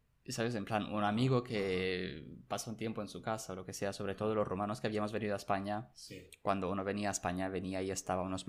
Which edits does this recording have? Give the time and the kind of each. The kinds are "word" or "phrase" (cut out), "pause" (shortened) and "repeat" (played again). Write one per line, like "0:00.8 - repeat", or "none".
none